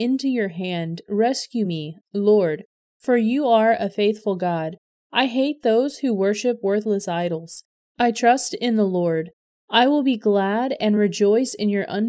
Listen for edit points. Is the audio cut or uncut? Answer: uncut